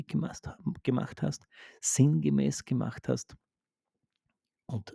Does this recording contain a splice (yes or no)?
no